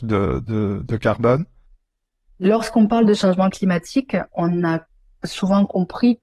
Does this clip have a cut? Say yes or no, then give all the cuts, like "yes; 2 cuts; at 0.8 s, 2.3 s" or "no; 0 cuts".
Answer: no; 0 cuts